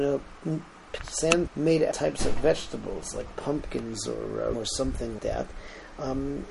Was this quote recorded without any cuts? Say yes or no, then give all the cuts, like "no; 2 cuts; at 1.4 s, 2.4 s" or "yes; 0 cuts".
no; 5 cuts; at 1.0 s, 1.5 s, 1.9 s, 4.5 s, 5.2 s